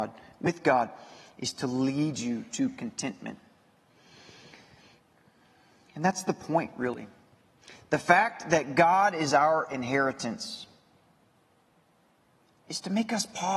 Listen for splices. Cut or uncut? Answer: uncut